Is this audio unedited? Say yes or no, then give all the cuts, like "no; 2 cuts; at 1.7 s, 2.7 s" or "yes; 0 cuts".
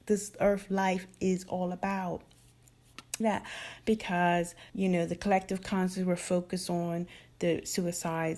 no; 2 cuts; at 3.2 s, 4.7 s